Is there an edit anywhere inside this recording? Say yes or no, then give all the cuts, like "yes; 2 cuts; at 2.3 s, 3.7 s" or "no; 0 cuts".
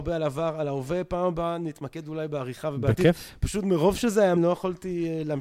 yes; 1 cut; at 4.4 s